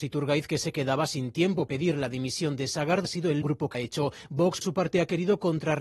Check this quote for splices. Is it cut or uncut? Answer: cut